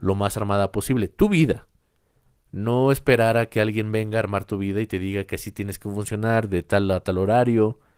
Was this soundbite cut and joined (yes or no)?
no